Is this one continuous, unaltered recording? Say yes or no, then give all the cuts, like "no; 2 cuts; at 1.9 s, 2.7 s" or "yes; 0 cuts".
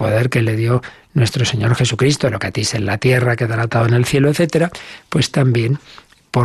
yes; 0 cuts